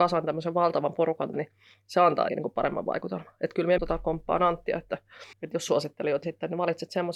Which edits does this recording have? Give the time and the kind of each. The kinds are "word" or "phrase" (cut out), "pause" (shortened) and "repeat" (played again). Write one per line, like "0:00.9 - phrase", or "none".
0:01.3 - word
0:02.3 - word
0:03.8 - phrase
0:05.3 - pause
0:05.7 - phrase
0:06.2 - word